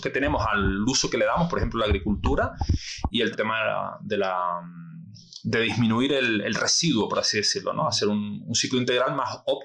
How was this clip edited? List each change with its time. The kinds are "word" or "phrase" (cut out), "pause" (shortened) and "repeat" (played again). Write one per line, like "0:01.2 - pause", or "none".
0:03.3 - phrase